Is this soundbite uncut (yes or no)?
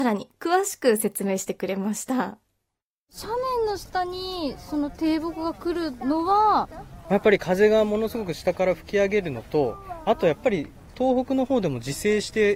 yes